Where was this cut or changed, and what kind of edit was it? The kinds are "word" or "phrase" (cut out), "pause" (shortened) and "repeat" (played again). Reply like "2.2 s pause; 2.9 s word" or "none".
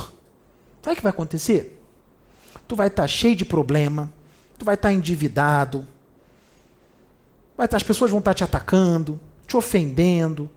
none